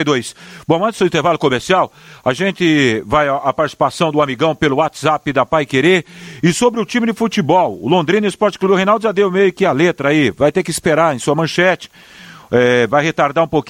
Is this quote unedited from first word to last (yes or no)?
yes